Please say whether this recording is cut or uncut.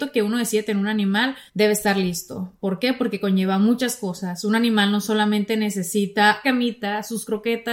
cut